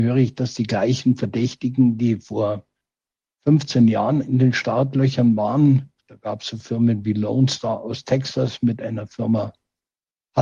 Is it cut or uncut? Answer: uncut